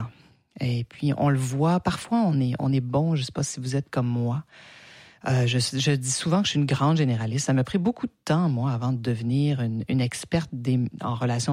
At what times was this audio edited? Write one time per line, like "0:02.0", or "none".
none